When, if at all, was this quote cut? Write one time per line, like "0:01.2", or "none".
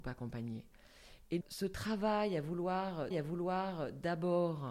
0:01.4
0:03.1